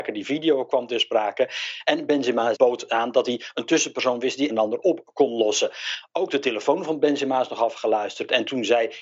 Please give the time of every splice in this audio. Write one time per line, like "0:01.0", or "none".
0:04.5